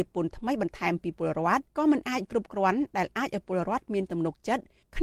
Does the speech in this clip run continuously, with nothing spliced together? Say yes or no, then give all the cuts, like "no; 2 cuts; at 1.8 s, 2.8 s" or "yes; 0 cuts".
no; 1 cut; at 1.7 s